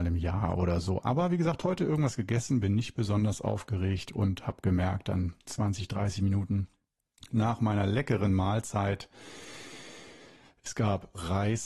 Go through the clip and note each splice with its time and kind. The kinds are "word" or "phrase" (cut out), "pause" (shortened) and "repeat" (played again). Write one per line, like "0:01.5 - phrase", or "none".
0:05.4 - pause